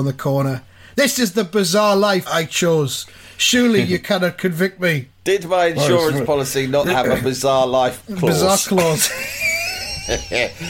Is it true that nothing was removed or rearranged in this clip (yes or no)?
no